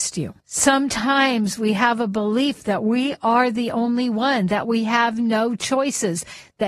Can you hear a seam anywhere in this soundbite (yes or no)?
no